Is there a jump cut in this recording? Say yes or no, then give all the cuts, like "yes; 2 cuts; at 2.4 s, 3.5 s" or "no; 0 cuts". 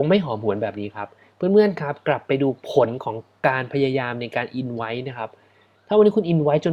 no; 0 cuts